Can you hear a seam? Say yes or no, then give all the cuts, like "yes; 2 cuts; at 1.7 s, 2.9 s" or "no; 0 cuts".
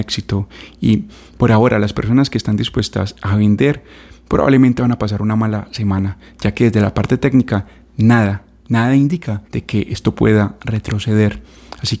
yes; 1 cut; at 9.4 s